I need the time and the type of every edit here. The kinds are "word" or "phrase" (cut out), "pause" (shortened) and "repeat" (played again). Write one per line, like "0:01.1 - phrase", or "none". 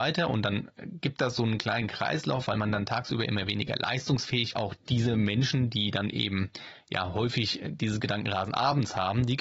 0:04.5 - phrase